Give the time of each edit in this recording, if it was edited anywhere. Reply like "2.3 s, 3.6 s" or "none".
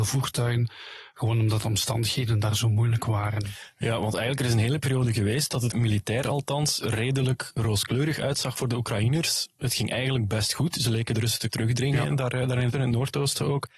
5.7 s, 11.5 s, 12.7 s